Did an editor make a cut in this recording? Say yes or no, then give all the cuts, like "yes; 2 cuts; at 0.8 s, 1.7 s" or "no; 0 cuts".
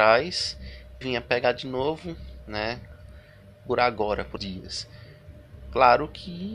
yes; 2 cuts; at 1.0 s, 4.4 s